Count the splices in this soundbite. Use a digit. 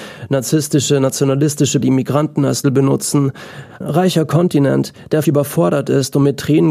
4